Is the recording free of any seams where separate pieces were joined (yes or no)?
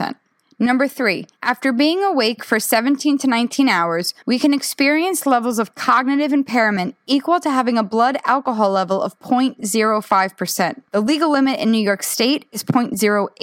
no